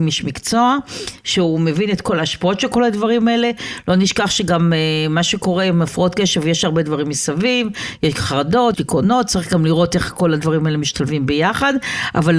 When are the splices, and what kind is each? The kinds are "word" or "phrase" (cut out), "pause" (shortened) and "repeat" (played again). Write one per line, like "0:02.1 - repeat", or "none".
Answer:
0:08.7 - word